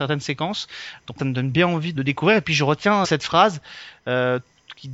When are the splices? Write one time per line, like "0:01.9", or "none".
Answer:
0:01.2
0:01.9
0:03.0